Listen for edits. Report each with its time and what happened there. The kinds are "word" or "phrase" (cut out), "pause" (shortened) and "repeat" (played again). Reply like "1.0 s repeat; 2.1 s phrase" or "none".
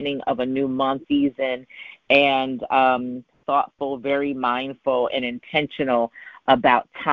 1.0 s phrase; 3.4 s phrase